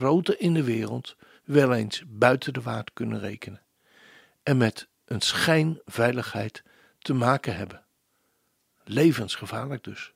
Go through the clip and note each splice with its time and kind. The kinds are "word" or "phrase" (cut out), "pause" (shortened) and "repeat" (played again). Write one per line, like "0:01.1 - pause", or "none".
none